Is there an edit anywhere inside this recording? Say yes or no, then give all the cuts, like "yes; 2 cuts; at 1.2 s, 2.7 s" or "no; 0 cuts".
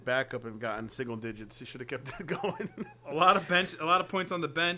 no; 0 cuts